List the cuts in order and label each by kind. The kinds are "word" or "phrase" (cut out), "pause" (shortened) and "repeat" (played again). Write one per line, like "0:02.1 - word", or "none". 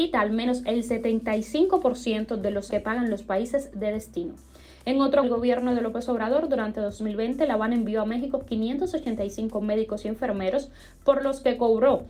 0:02.7 - word
0:05.2 - phrase